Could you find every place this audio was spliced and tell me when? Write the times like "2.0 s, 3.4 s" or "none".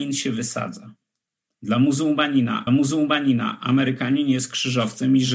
2.7 s